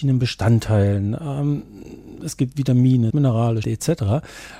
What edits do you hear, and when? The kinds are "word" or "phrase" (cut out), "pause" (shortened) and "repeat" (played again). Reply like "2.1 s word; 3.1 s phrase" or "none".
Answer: 3.1 s phrase; 3.6 s word